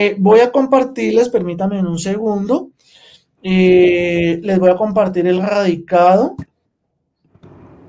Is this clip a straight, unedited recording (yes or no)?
yes